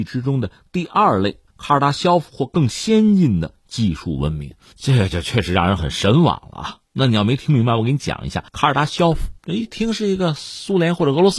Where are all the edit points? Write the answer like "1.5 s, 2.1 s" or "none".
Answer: 1.5 s, 6.8 s, 8.5 s, 9.4 s